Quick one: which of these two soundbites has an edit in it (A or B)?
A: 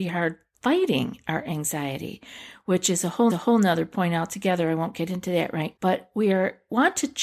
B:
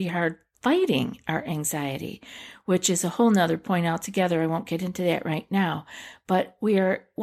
A